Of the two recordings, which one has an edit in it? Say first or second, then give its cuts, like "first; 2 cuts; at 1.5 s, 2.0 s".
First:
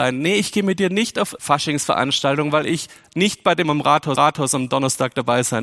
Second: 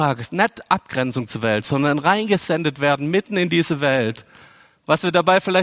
first; 3 cuts; at 1.4 s, 3.6 s, 4.2 s